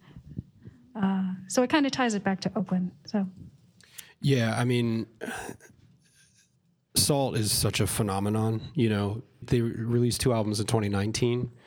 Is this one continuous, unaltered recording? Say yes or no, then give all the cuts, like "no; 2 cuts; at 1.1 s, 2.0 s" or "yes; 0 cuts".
no; 1 cut; at 9.4 s